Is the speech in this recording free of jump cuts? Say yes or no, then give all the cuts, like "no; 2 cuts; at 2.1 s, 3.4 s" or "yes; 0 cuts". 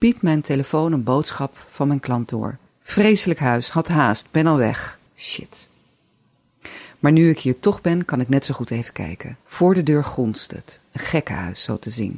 no; 3 cuts; at 2.7 s, 5.1 s, 9.4 s